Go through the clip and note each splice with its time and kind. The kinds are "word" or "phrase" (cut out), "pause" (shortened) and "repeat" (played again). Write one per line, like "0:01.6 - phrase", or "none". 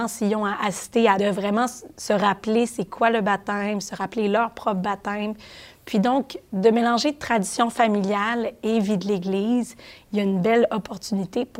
0:01.2 - phrase